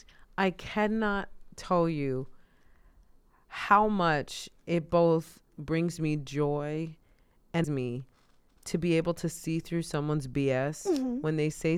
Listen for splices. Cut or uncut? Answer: cut